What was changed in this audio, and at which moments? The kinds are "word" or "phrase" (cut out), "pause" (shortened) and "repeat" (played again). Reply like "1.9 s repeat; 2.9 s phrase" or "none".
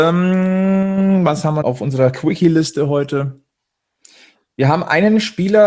1.6 s phrase